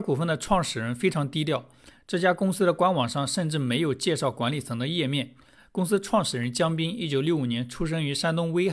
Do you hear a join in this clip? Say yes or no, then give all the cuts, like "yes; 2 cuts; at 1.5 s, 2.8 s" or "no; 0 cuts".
no; 0 cuts